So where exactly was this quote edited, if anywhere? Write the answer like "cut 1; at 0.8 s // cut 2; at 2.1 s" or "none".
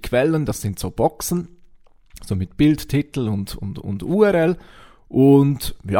none

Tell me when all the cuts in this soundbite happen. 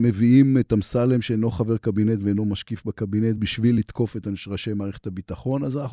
none

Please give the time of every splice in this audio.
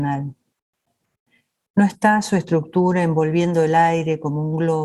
none

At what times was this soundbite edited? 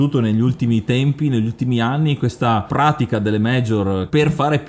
none

